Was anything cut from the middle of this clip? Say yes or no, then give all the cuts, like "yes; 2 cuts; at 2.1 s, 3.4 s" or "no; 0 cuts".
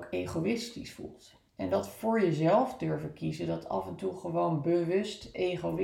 yes; 1 cut; at 1.5 s